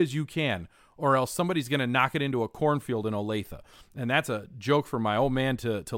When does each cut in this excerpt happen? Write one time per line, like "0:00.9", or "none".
none